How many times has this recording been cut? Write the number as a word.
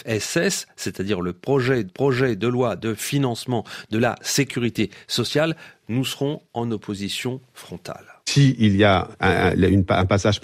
three